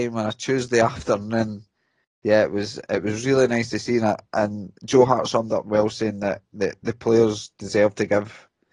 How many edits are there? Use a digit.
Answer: 0